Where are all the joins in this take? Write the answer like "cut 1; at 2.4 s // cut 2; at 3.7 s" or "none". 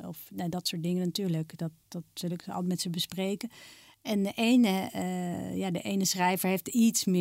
none

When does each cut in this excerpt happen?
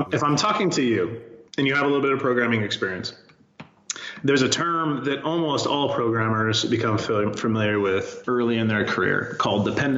cut 1; at 1.5 s // cut 2; at 8.2 s

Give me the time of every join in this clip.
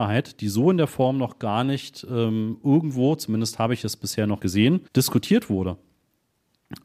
cut 1; at 4.4 s // cut 2; at 4.9 s

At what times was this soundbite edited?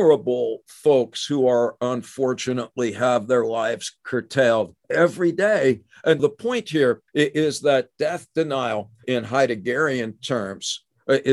cut 1; at 4.8 s // cut 2; at 6.2 s // cut 3; at 7.1 s // cut 4; at 9.0 s

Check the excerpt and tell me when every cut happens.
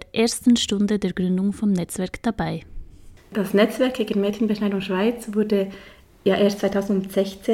none

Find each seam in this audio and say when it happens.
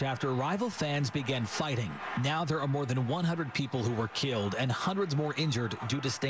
none

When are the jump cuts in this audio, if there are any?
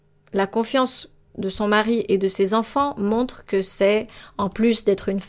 none

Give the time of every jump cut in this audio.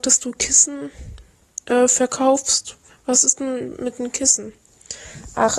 none

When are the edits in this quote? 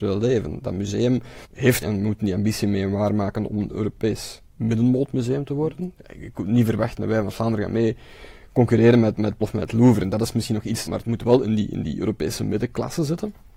cut 1; at 1.4 s // cut 2; at 1.8 s // cut 3; at 4.5 s // cut 4; at 9.4 s // cut 5; at 10.9 s

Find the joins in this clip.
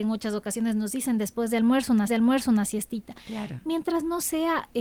cut 1; at 2.1 s

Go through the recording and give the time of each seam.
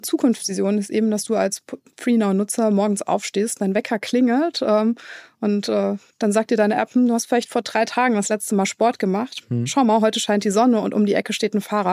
none

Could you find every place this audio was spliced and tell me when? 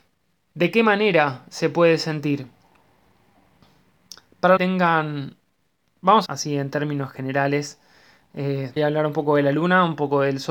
cut 1; at 4.6 s // cut 2; at 6.3 s // cut 3; at 8.8 s

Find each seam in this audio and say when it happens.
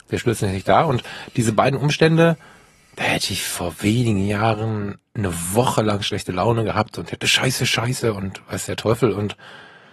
cut 1; at 7.2 s

